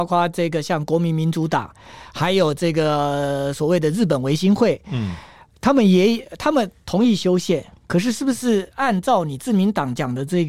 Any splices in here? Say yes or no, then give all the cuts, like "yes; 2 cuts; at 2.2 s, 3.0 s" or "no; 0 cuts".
no; 0 cuts